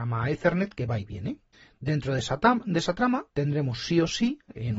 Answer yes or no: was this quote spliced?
yes